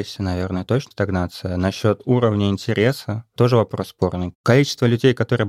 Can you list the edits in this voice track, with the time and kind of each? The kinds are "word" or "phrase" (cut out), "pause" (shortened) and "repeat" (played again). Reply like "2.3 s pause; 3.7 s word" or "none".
0.9 s word; 3.4 s word